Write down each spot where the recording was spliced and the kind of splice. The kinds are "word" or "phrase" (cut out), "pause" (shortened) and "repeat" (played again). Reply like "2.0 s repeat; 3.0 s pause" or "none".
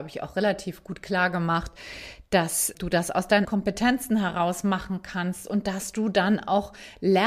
2.7 s word; 3.4 s word